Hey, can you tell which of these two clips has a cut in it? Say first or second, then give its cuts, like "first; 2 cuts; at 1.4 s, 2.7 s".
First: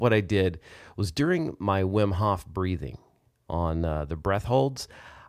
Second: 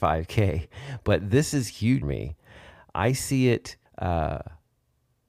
second; 2 cuts; at 2.0 s, 3.9 s